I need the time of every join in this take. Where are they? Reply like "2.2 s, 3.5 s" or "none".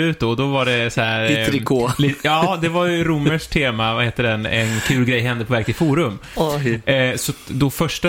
none